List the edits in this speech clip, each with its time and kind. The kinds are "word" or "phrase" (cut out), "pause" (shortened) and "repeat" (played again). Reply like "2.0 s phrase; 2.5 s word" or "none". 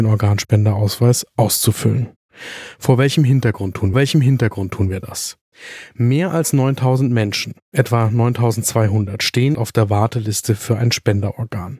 3.9 s repeat; 9.5 s phrase